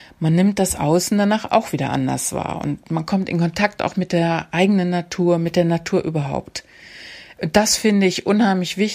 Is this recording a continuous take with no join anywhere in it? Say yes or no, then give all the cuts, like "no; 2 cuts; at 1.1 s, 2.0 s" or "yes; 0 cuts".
yes; 0 cuts